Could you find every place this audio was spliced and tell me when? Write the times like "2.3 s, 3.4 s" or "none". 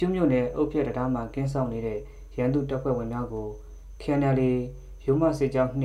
none